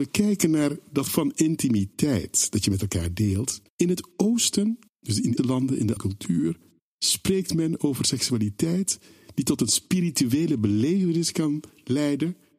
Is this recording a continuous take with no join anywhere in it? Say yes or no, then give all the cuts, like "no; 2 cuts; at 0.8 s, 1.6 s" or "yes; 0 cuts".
no; 6 cuts; at 1.1 s, 3.7 s, 4.9 s, 5.4 s, 6.0 s, 6.8 s